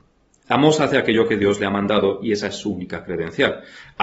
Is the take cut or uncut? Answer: uncut